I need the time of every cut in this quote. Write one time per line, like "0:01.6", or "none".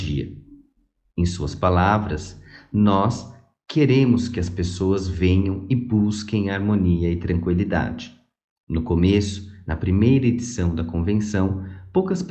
none